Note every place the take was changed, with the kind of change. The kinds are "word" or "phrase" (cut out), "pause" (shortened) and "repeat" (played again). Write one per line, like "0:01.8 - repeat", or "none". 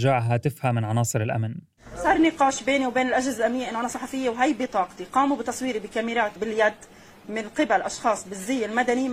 0:06.4 - word